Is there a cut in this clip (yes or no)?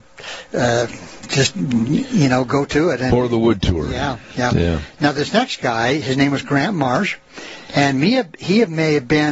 no